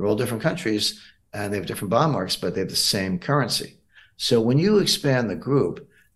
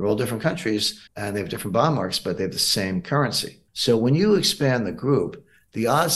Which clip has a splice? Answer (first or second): second